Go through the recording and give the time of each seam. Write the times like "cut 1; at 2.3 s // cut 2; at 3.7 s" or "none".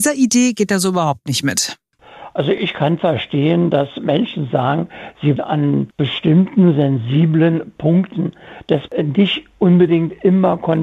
cut 1; at 5.4 s // cut 2; at 8.9 s